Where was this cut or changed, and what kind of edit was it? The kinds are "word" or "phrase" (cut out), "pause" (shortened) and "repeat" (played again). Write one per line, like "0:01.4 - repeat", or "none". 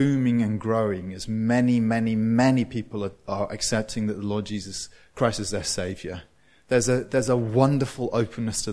none